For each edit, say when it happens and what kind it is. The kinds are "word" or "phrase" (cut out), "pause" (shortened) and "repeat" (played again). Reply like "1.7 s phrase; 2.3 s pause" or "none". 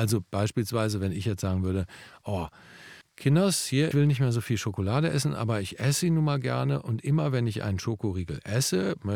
3.0 s pause; 3.9 s phrase